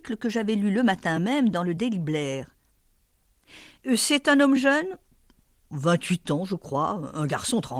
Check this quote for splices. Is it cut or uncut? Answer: uncut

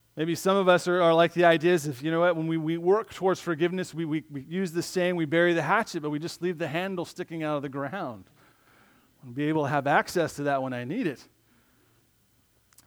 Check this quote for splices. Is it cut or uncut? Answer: uncut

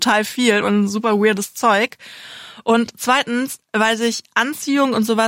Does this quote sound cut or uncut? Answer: uncut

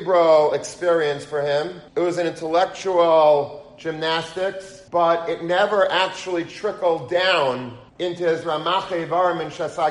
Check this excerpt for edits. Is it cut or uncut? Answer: cut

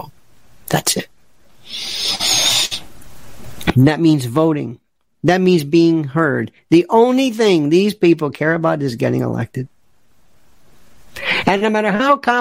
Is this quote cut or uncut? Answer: uncut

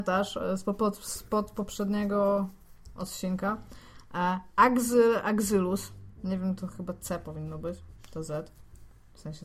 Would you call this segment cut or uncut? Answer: cut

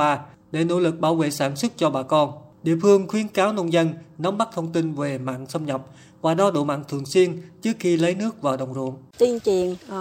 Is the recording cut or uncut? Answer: uncut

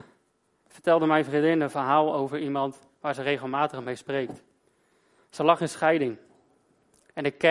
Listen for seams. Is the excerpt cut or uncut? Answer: uncut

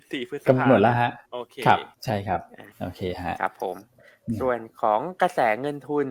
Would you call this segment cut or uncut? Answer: cut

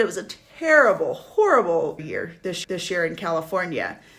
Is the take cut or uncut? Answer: cut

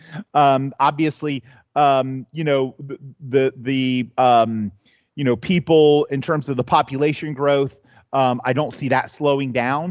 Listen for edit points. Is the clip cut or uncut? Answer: uncut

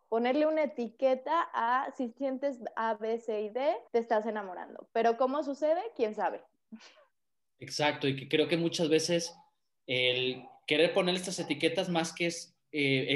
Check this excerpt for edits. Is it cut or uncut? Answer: cut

